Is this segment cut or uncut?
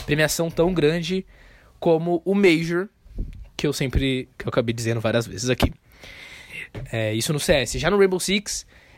uncut